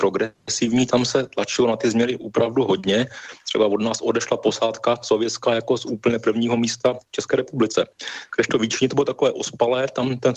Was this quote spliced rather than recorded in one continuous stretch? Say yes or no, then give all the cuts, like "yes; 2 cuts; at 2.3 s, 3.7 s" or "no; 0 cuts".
yes; 1 cut; at 3.4 s